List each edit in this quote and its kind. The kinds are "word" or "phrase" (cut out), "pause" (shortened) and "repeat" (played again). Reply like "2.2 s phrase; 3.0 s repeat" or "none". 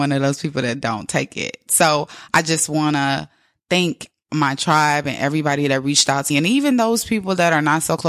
6.3 s word